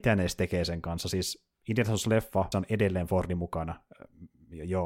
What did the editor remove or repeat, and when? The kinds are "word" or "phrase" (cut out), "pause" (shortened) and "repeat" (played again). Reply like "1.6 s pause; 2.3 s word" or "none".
2.5 s word